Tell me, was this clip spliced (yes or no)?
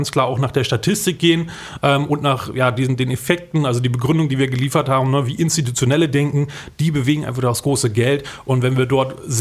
no